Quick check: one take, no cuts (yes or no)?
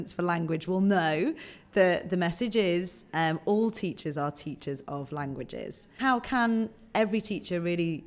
yes